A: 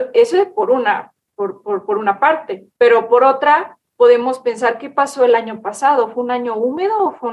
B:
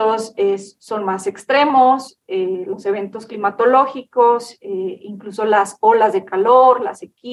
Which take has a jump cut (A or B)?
A